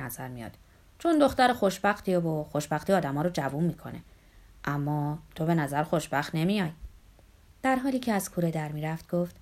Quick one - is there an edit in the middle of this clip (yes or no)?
no